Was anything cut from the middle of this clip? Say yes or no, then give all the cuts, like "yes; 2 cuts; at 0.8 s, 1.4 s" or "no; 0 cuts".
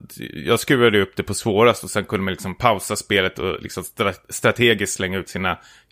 no; 0 cuts